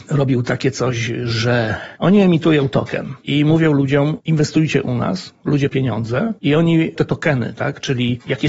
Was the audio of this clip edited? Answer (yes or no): yes